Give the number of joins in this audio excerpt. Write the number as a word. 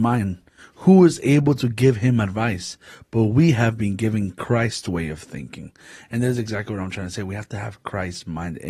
zero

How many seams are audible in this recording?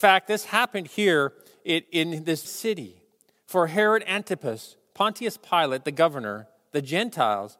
one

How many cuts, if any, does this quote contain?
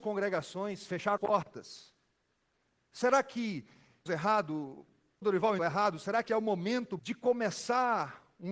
six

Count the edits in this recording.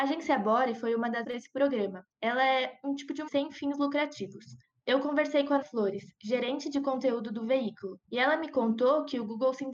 six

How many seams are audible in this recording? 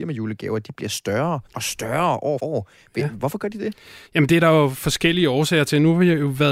three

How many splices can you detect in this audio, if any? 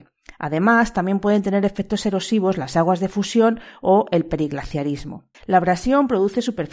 one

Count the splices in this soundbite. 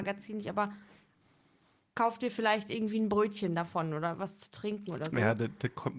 zero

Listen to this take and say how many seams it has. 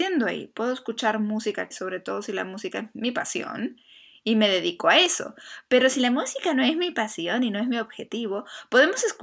one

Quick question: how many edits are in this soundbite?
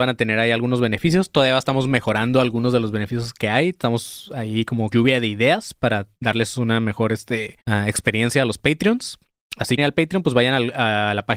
three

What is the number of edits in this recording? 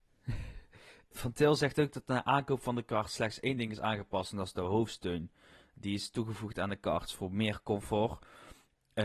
one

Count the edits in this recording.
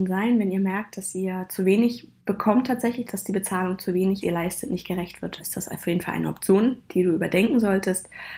four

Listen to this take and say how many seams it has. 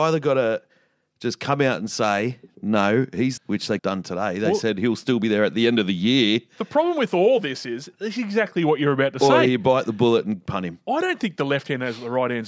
two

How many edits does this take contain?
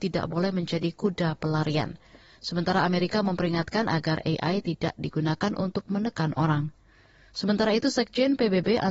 zero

